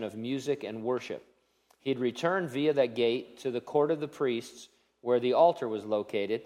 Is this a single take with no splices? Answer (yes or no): yes